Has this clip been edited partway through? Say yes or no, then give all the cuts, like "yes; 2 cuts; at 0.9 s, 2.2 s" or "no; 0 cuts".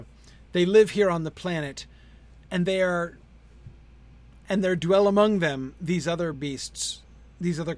no; 0 cuts